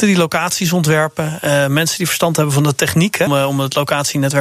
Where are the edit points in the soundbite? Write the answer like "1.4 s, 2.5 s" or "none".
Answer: 3.3 s